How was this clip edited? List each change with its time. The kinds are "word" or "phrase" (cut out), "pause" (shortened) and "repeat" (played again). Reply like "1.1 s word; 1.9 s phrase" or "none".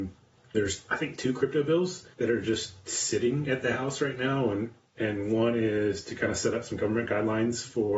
2.1 s pause